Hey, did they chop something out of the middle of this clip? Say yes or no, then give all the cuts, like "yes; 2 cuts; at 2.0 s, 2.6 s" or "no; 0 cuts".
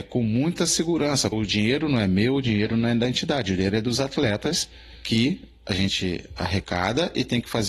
yes; 1 cut; at 1.3 s